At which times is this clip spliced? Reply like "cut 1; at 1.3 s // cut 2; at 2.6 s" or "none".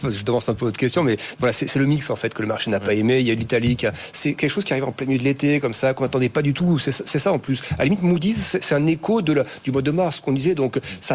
cut 1; at 1.7 s